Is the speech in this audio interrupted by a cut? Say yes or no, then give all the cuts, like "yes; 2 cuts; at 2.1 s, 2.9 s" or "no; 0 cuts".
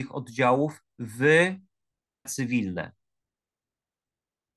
yes; 1 cut; at 2.3 s